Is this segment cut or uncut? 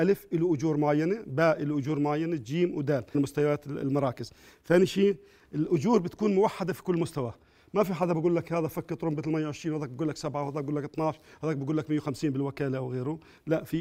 cut